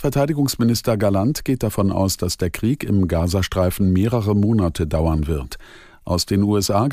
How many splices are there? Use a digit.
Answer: 0